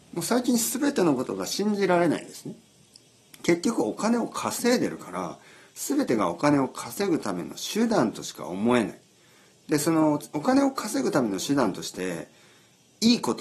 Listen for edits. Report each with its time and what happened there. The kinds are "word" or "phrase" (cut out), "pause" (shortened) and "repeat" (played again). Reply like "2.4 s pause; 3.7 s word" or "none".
none